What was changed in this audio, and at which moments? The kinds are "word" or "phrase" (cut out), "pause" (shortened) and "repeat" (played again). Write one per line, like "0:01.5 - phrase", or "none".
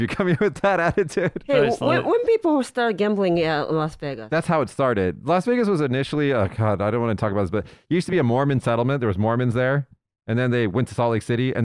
none